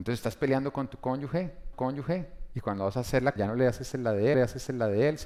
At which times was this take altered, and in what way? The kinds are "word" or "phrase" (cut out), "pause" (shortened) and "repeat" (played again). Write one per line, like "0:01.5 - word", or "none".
0:01.7 - repeat
0:03.4 - word
0:04.3 - repeat